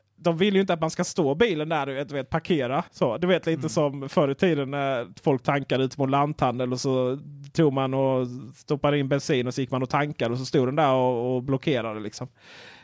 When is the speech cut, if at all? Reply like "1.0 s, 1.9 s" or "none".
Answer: 2.9 s